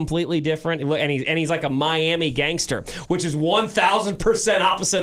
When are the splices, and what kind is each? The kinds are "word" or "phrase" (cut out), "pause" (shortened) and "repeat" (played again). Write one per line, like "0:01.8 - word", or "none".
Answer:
none